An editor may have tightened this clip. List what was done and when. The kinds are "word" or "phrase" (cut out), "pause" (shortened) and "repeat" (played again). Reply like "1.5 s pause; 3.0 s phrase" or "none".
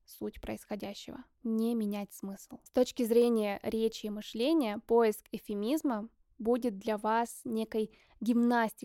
2.7 s pause